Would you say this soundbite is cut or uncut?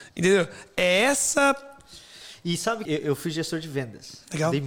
cut